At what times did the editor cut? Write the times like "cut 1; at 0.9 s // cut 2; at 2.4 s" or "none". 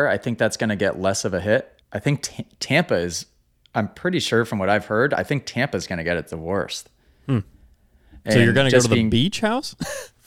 cut 1; at 1.8 s